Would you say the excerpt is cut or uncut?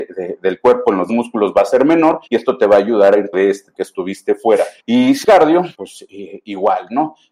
cut